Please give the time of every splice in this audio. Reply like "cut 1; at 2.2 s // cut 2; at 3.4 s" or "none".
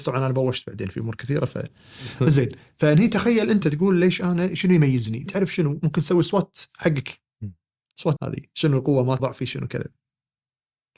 cut 1; at 3.6 s // cut 2; at 5.3 s // cut 3; at 8.2 s // cut 4; at 9.2 s